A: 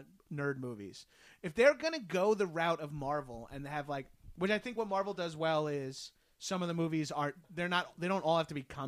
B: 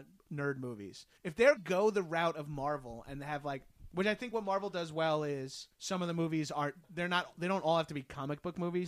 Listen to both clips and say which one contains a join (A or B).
B